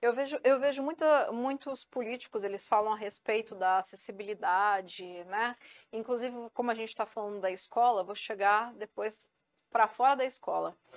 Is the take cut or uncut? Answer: uncut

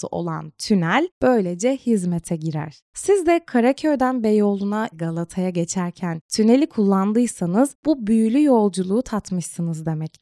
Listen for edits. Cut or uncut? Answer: cut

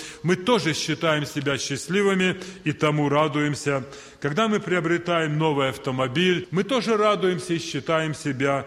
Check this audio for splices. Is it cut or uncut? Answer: uncut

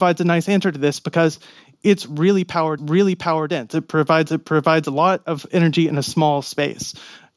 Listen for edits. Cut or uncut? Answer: cut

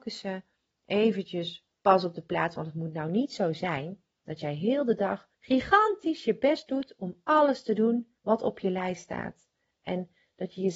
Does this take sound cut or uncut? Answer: cut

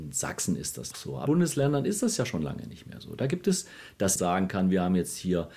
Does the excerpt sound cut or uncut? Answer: cut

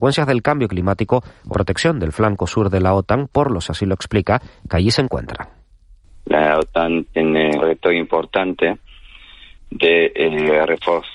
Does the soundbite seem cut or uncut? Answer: cut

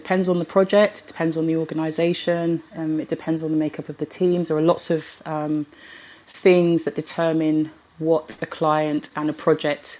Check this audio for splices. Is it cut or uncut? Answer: uncut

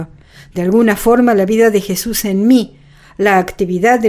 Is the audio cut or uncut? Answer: uncut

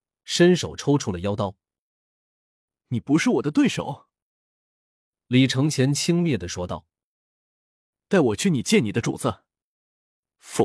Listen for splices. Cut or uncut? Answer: uncut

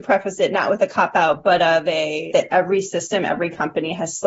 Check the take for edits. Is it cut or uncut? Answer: cut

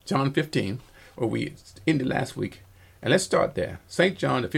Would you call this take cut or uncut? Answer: uncut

